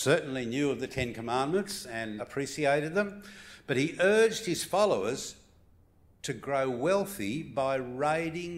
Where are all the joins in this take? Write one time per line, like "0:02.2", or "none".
0:02.2